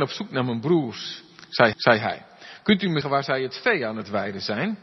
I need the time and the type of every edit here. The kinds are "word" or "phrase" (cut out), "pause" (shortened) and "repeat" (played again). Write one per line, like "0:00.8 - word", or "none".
0:01.7 - repeat
0:03.0 - word